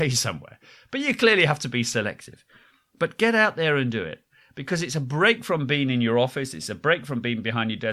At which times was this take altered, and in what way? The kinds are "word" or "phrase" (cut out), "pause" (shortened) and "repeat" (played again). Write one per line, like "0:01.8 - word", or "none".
none